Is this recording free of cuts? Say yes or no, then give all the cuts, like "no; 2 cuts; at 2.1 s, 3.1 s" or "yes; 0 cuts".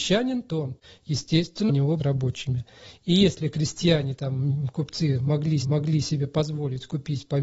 no; 3 cuts; at 1.7 s, 2.0 s, 5.6 s